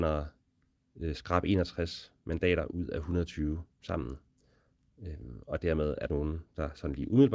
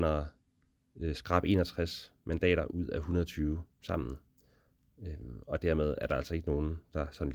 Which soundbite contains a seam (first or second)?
first